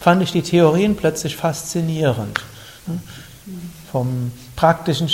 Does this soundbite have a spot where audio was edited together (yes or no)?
no